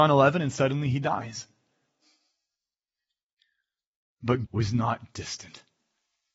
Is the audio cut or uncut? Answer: cut